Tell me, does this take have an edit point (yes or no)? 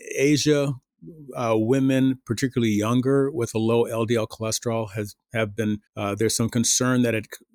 yes